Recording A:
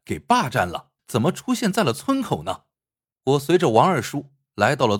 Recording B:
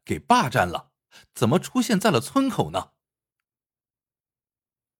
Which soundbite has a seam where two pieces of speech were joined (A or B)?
A